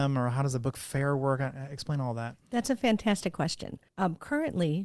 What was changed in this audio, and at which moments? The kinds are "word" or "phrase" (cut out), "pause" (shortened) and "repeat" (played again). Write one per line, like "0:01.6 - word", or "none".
0:03.9 - pause